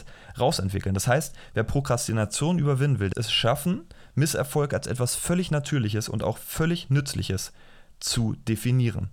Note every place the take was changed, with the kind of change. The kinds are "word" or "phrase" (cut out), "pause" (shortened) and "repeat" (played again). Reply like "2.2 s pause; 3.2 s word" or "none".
3.1 s word